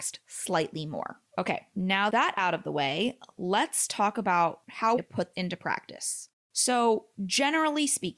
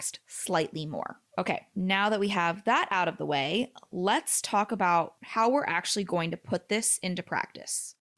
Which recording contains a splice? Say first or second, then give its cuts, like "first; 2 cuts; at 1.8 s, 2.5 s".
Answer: first; 3 cuts; at 2.1 s, 5.0 s, 5.3 s